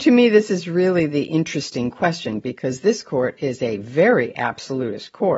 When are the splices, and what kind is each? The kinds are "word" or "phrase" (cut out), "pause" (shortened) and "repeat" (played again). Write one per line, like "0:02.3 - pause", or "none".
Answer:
none